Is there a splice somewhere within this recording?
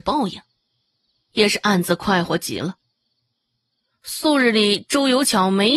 no; 0 cuts

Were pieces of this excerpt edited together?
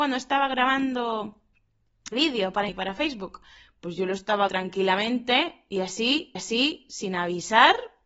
yes; 4 cuts; at 2.1 s, 2.7 s, 4.5 s, 6.4 s

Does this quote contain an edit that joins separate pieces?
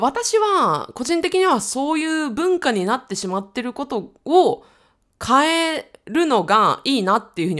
no; 0 cuts

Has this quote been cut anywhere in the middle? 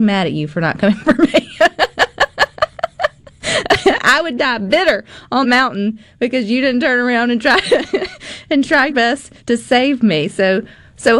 yes; 4 cuts; at 1.0 s, 5.4 s, 8.9 s, 9.4 s

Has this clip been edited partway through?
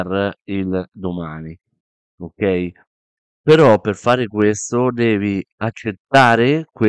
no; 0 cuts

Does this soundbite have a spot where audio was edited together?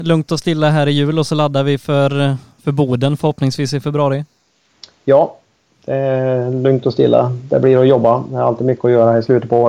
no; 0 cuts

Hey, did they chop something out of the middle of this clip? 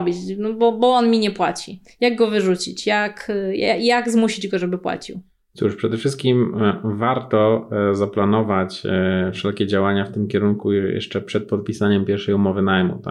no; 0 cuts

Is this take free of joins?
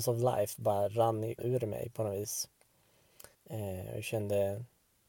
no; 2 cuts; at 1.4 s, 3.3 s

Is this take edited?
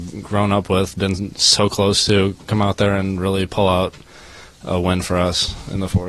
no; 0 cuts

